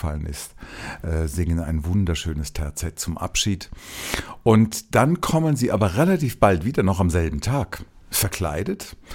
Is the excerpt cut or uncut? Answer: uncut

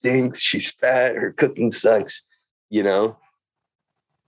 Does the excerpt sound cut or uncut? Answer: uncut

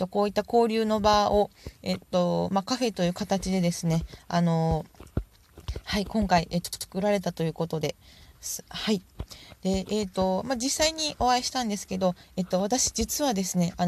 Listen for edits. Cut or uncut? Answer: uncut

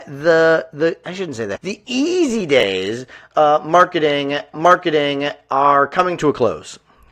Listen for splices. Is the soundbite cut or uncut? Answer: cut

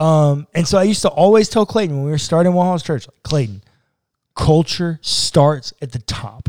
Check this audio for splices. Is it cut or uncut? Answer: uncut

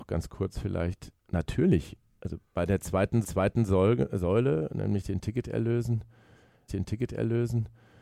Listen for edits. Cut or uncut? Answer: cut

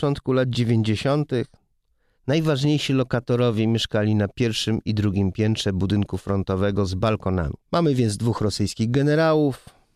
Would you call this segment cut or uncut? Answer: cut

